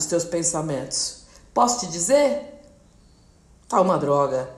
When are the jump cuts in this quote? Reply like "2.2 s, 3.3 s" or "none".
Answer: none